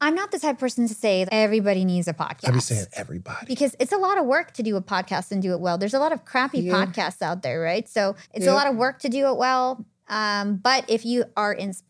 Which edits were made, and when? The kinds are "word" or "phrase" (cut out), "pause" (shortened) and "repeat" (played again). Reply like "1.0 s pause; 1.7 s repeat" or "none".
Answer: 1.3 s word; 8.2 s pause

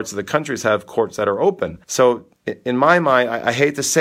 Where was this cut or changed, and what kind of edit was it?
1.8 s pause

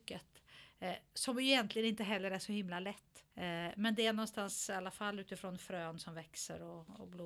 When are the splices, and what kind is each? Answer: 3.3 s pause

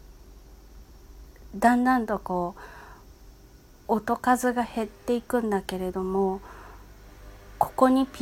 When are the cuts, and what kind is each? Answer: none

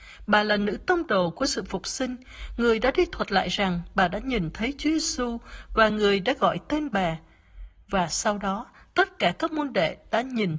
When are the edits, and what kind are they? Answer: none

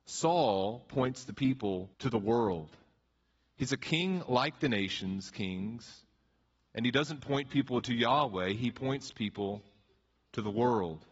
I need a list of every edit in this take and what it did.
1.9 s pause

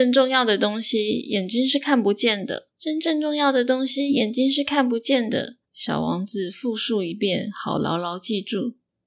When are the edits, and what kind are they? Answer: 2.7 s pause; 5.6 s pause

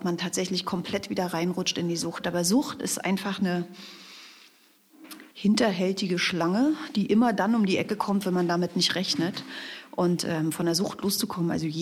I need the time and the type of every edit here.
5.3 s pause

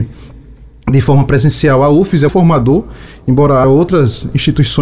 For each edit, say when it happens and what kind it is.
2.3 s phrase; 3.6 s word

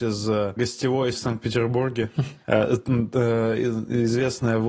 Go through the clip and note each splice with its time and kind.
1.1 s word; 2.4 s pause

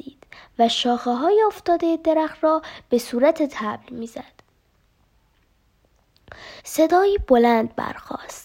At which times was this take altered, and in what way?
6.6 s pause

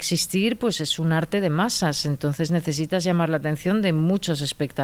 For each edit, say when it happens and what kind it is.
none

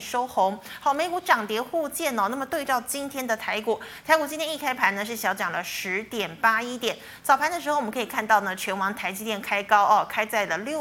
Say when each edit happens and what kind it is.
none

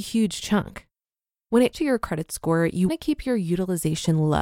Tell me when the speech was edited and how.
1.7 s word; 2.9 s word

